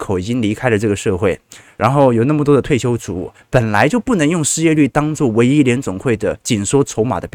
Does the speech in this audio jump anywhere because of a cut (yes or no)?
no